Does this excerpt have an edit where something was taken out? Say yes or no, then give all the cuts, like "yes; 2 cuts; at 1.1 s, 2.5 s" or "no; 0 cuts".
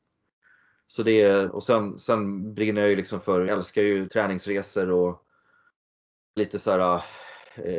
yes; 4 cuts; at 1.5 s, 3.5 s, 4.1 s, 6.4 s